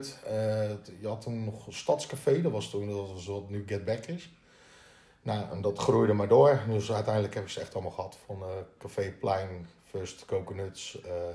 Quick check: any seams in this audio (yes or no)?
no